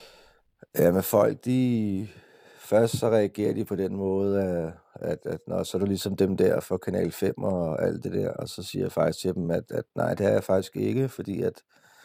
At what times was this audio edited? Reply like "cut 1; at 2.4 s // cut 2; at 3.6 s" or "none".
none